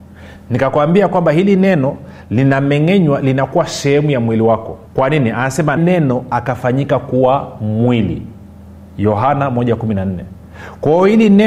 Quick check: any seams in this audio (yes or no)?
yes